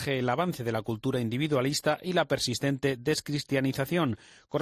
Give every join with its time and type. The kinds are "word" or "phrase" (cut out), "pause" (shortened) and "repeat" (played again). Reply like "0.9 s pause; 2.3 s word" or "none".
none